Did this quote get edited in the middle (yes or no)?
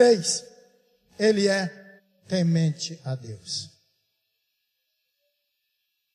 yes